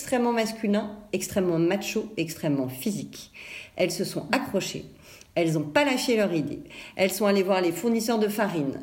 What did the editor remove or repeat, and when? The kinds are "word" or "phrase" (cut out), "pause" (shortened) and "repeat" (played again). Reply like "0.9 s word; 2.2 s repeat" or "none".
none